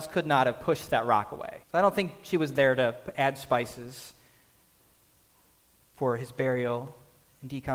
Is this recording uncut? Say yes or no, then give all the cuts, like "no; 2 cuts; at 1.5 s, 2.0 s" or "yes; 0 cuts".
no; 1 cut; at 1.6 s